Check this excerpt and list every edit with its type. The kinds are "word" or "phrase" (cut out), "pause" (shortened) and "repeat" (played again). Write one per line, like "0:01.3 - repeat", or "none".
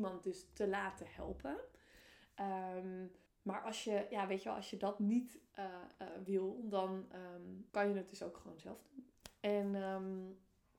0:03.3 - pause
0:07.7 - pause